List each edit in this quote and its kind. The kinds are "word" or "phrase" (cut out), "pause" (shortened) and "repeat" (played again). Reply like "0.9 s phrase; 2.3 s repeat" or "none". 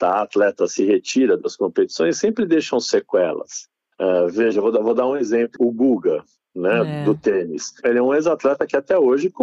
5.6 s word